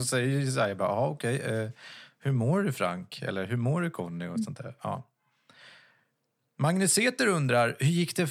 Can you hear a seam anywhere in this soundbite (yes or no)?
no